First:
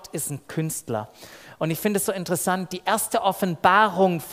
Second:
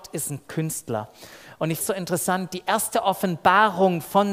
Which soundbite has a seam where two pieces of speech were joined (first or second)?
second